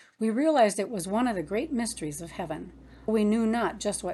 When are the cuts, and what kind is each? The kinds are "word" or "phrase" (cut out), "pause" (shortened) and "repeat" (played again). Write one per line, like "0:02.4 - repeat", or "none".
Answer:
0:03.1 - word

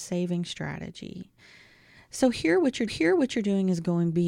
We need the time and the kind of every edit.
0:02.9 - repeat

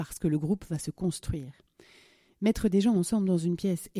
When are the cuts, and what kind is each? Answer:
none

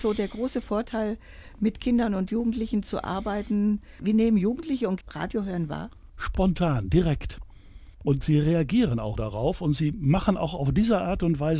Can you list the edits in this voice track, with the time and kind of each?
0:05.0 - word
0:06.1 - pause
0:07.9 - pause
0:09.2 - word

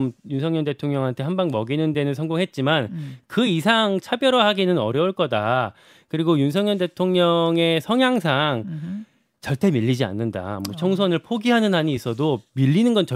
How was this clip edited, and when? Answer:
none

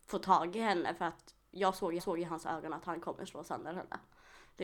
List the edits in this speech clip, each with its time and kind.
0:02.0 - repeat

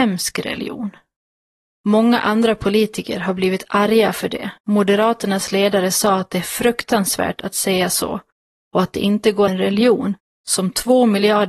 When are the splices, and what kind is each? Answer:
0:04.6 - pause
0:09.5 - phrase

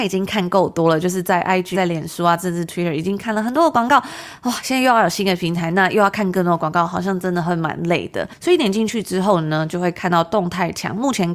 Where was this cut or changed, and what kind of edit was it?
0:01.7 - word

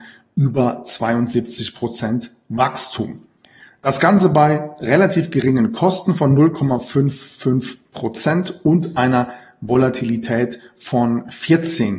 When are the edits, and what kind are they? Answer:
none

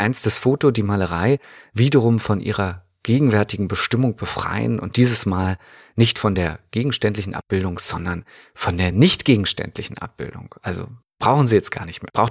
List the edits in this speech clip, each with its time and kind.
none

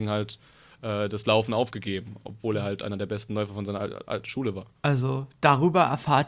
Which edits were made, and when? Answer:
0:04.8 - pause

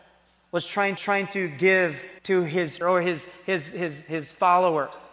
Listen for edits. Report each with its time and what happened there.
0:01.0 - repeat
0:02.2 - pause
0:02.8 - word

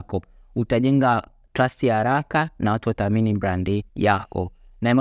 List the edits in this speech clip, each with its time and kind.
0:03.9 - pause

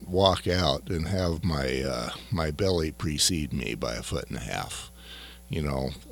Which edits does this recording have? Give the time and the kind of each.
none

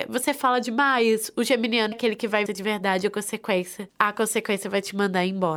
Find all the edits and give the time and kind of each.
0:01.9 - word
0:02.5 - phrase

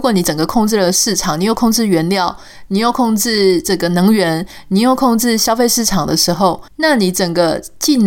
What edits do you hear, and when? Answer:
0:06.7 - pause

